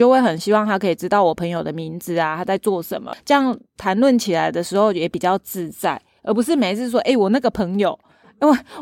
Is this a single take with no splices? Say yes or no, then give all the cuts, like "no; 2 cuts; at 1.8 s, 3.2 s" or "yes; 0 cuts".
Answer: yes; 0 cuts